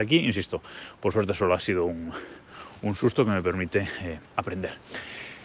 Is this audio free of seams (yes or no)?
no